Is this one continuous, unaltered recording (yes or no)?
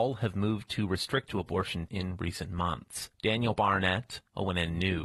no